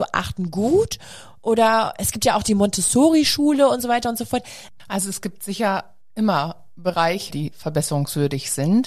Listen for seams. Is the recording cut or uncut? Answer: uncut